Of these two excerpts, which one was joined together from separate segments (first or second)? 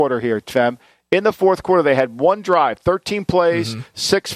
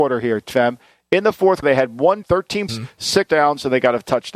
second